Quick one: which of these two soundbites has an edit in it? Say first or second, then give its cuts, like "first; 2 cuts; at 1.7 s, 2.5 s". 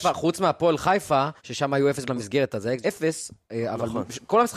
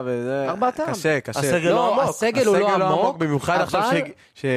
first; 3 cuts; at 1.4 s, 2.1 s, 2.8 s